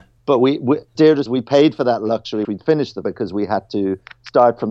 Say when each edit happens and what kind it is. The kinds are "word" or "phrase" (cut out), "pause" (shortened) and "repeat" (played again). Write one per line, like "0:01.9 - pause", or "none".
0:01.0 - word
0:01.3 - word
0:02.4 - word
0:03.0 - word